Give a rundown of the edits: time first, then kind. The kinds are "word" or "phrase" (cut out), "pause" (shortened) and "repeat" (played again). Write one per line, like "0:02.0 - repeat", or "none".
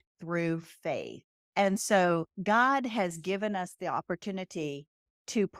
0:01.3 - pause